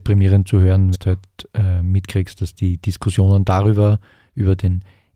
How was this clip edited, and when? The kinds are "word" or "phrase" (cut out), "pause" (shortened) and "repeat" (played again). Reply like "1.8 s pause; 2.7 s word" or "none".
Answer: 0.9 s word